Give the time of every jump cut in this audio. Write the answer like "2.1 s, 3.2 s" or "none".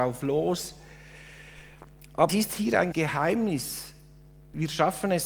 2.3 s, 2.9 s